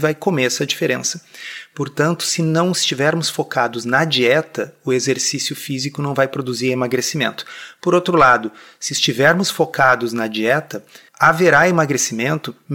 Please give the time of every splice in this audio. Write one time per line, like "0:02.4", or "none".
none

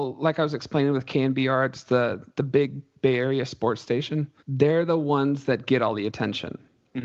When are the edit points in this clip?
0:02.3
0:04.4

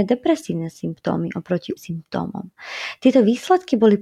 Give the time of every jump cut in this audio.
0:01.8

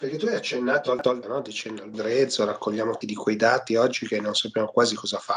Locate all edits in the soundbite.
0:01.2
0:01.9
0:03.0

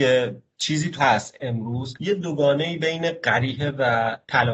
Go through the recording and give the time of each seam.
0:01.0

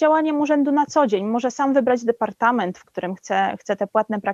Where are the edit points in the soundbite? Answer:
none

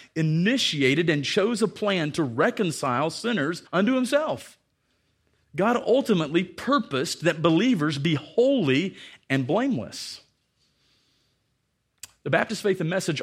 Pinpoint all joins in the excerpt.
0:03.7

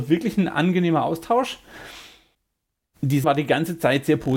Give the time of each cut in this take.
0:03.2

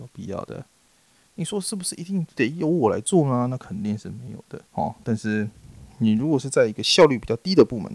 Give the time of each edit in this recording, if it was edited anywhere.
0:04.7

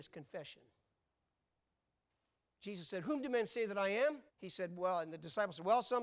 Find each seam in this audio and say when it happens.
0:04.3

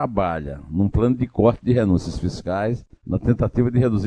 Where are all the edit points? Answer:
0:03.0

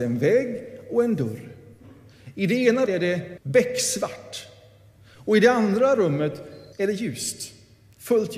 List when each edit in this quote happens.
0:02.9
0:03.4
0:06.7

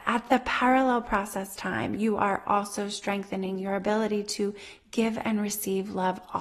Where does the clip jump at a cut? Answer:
none

